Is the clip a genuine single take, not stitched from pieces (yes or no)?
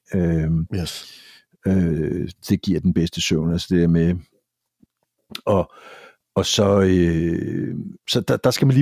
yes